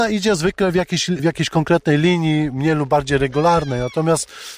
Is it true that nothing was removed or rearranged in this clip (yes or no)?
yes